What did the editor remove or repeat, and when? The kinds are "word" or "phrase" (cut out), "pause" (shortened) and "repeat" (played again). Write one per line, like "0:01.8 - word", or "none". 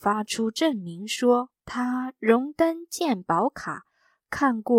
0:01.6 - pause